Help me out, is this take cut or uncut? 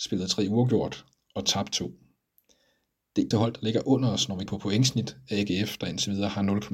cut